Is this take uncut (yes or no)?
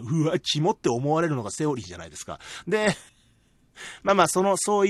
no